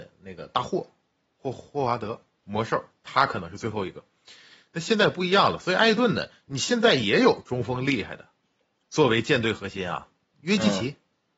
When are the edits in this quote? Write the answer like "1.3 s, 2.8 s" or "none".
2.4 s